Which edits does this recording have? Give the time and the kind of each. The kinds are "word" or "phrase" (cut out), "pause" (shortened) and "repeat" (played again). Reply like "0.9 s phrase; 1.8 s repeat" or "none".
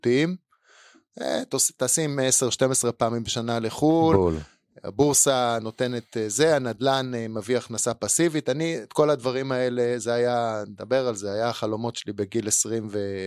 none